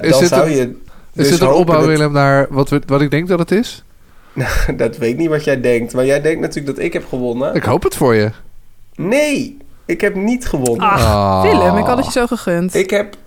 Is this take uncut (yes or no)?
yes